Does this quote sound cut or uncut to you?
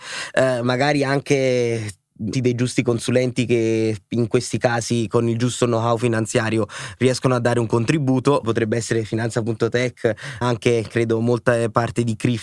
cut